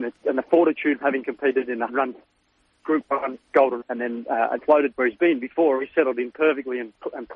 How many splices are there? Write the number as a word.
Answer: five